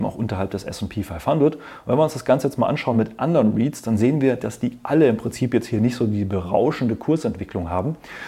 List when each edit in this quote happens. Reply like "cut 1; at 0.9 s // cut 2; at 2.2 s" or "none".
none